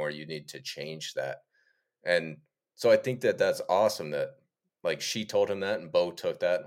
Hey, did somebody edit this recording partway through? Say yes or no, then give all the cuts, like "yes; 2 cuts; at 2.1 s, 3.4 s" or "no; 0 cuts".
no; 0 cuts